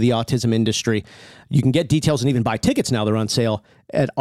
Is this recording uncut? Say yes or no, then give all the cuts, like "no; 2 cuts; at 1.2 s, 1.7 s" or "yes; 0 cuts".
yes; 0 cuts